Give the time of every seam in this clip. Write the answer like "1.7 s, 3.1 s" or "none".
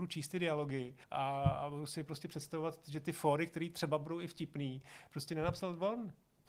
1.0 s

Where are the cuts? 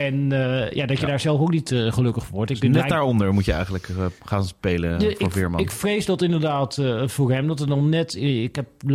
4.2 s

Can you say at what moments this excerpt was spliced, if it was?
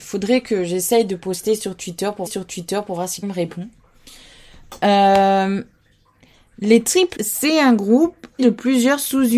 2.3 s, 3.2 s, 7.2 s, 8.4 s

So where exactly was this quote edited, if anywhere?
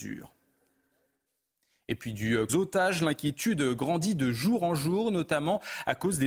2.5 s

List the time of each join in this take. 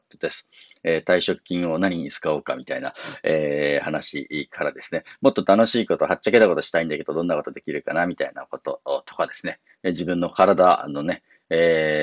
none

